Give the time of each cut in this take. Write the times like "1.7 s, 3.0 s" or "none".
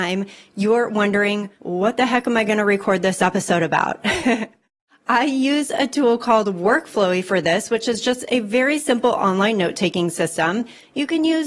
none